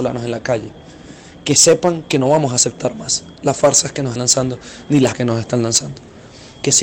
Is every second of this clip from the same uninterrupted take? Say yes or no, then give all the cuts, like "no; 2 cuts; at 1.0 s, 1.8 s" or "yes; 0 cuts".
no; 2 cuts; at 4.2 s, 5.1 s